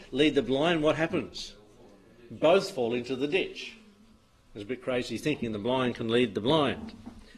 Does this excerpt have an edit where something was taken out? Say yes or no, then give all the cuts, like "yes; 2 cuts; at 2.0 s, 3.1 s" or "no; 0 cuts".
no; 0 cuts